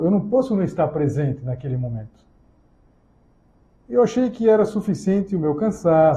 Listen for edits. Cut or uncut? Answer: uncut